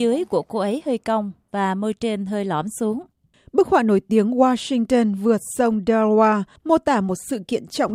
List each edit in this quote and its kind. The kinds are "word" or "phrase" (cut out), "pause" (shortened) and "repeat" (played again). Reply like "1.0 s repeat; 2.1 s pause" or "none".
none